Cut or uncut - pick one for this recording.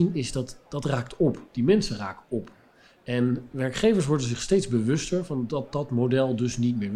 uncut